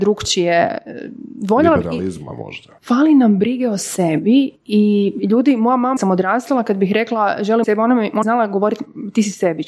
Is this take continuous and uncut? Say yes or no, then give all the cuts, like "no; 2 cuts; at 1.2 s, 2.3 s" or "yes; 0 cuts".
no; 4 cuts; at 2.8 s, 6.0 s, 7.6 s, 8.2 s